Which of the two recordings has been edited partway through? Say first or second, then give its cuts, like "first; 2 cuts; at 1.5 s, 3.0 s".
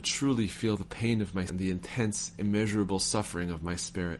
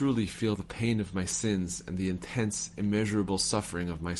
first; 1 cut; at 1.5 s